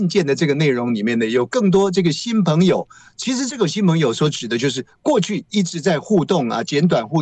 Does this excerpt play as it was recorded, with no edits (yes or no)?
yes